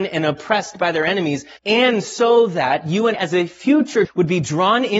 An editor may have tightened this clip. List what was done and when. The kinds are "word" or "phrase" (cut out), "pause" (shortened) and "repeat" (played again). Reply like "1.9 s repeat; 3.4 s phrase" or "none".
1.6 s pause; 3.1 s word; 4.0 s word